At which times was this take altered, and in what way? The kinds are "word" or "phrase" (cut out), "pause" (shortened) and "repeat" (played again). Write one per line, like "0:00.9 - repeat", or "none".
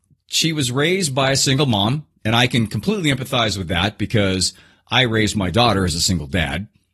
none